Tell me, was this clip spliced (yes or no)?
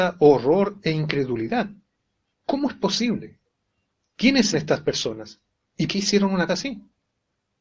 yes